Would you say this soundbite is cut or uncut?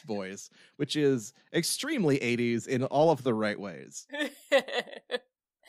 uncut